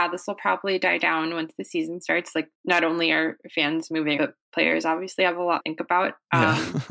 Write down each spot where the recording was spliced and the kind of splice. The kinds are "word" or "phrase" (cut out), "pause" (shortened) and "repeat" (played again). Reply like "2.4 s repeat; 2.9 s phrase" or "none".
2.5 s pause; 4.2 s word; 5.6 s phrase